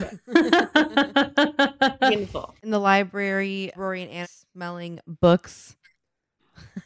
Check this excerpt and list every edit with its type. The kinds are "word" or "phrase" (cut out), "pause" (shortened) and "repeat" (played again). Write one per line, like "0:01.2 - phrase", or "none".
0:02.6 - pause
0:03.7 - word
0:04.2 - word